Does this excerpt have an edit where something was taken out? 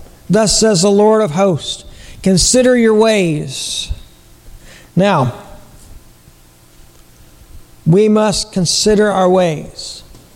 no; 0 cuts

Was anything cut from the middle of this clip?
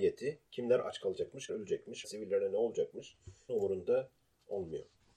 yes; 3 cuts; at 1.5 s, 2.0 s, 3.5 s

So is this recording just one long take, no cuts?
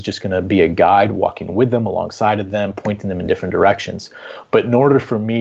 yes; 0 cuts

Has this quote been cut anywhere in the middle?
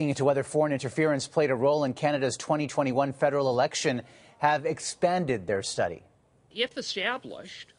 no; 0 cuts

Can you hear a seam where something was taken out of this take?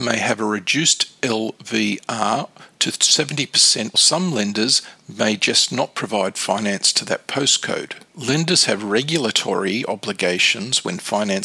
yes; 2 cuts; at 3.9 s, 8.1 s

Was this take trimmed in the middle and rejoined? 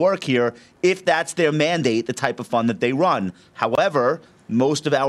no; 0 cuts

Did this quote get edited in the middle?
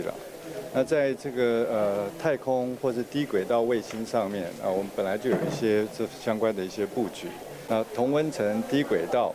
no; 0 cuts

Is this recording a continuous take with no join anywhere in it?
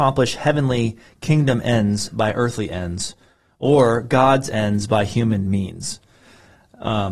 yes; 0 cuts

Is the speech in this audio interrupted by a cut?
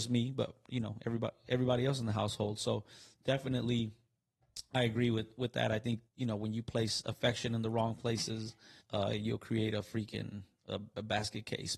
yes; 2 cuts; at 6.1 s, 8.8 s

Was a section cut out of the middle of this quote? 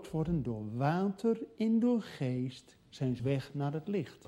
yes; 1 cut; at 3.2 s

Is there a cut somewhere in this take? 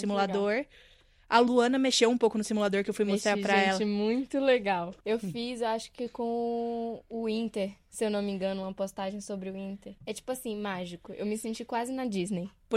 yes; 2 cuts; at 5.0 s, 10.0 s

